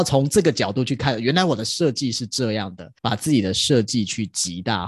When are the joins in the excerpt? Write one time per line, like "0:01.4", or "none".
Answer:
0:03.0